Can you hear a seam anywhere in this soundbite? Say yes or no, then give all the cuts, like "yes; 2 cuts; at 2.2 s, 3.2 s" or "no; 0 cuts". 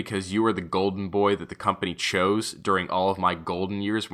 no; 0 cuts